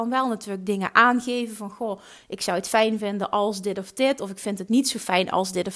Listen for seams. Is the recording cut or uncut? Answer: uncut